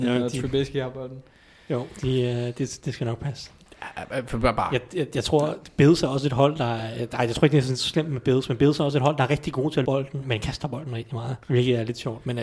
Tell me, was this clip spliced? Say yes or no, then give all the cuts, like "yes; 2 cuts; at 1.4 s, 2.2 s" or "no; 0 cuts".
yes; 2 cuts; at 9.8 s, 11.4 s